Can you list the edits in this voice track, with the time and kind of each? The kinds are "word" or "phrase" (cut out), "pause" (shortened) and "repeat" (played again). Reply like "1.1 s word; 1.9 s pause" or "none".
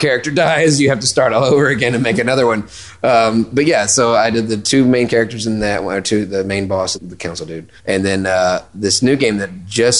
6.9 s phrase; 7.8 s pause